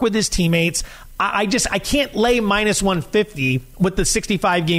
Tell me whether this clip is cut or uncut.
uncut